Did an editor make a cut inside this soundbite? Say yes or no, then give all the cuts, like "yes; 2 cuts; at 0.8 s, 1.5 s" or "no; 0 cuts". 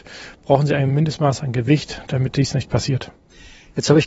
no; 0 cuts